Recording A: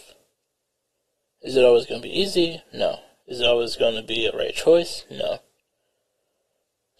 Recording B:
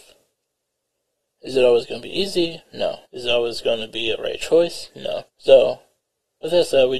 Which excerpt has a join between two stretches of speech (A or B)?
B